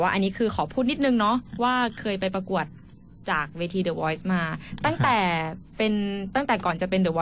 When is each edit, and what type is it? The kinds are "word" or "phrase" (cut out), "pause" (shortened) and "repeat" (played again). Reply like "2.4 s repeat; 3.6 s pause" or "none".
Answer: none